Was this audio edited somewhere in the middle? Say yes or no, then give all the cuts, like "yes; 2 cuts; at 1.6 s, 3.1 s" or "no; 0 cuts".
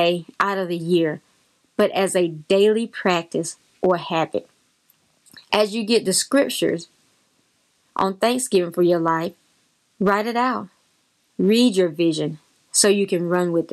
no; 0 cuts